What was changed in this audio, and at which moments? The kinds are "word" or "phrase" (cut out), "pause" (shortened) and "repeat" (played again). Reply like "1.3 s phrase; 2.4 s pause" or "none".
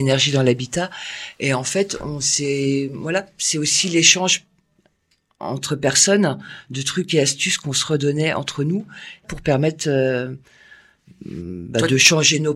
none